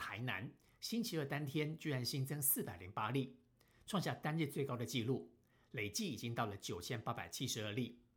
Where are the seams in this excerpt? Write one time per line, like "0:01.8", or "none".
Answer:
none